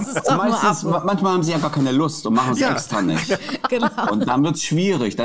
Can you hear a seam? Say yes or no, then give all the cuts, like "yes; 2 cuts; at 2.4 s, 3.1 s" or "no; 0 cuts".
no; 0 cuts